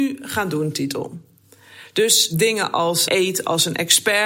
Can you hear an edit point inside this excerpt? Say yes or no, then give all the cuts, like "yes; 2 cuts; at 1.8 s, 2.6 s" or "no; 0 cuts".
no; 0 cuts